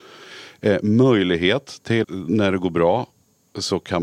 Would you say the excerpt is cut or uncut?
cut